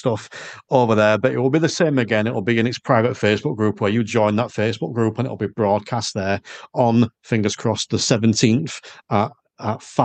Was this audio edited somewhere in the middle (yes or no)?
no